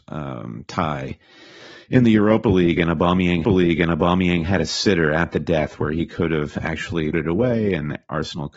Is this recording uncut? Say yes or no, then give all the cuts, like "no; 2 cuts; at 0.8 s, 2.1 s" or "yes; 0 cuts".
no; 2 cuts; at 3.4 s, 7.1 s